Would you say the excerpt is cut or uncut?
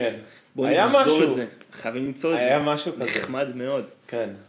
uncut